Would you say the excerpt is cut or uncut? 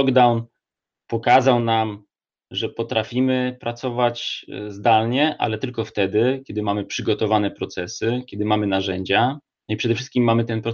uncut